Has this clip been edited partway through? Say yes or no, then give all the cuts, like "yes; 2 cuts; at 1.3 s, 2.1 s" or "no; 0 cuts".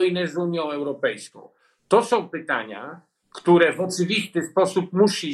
no; 0 cuts